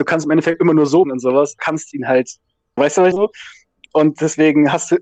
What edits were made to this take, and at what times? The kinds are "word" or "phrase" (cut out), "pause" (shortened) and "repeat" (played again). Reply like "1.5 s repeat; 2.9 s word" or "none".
1.0 s word; 1.6 s word; 2.8 s word; 3.1 s word